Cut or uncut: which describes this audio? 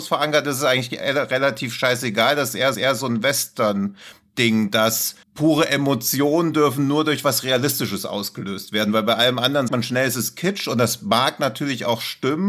cut